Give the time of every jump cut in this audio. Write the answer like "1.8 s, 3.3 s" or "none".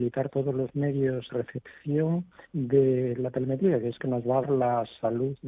1.3 s, 2.5 s, 4.0 s, 4.4 s